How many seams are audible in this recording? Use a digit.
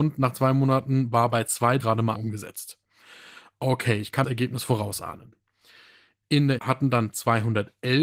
4